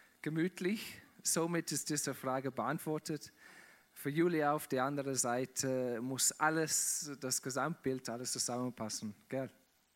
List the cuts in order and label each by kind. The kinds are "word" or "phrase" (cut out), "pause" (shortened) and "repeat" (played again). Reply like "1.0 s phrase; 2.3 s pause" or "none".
none